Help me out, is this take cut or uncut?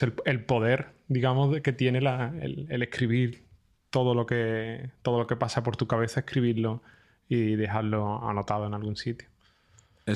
uncut